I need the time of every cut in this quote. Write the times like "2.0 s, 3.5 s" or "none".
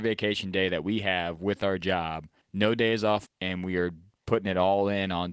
2.4 s, 3.3 s